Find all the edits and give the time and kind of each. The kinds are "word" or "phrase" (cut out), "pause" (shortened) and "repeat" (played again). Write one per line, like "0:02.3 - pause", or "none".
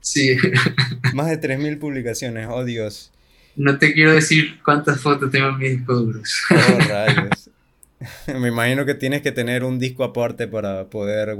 none

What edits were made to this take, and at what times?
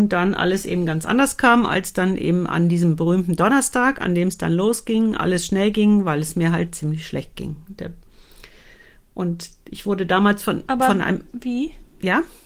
none

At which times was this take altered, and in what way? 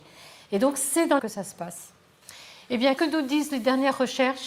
0:01.2 - word
0:03.0 - word

